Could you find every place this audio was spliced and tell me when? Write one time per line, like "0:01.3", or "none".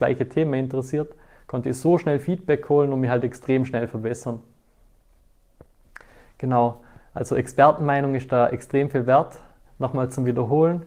none